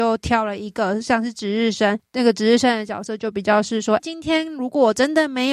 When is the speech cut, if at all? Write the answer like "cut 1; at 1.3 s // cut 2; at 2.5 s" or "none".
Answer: cut 1; at 4.0 s